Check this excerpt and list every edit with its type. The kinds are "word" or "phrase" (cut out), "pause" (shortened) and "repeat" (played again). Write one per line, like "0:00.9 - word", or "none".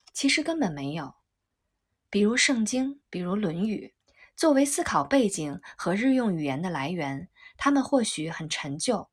0:03.0 - pause
0:04.0 - pause